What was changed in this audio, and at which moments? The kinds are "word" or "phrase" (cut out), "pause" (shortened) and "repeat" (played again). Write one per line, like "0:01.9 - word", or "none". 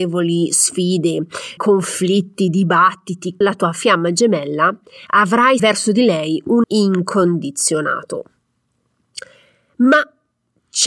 0:01.6 - word
0:03.4 - word
0:05.6 - word
0:06.6 - word